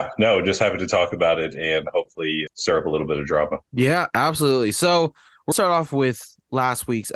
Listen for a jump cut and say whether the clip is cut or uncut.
cut